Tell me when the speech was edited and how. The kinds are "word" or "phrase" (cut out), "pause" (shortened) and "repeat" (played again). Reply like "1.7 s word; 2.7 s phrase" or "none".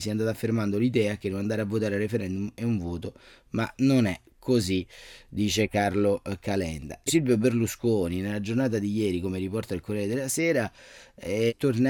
7.1 s word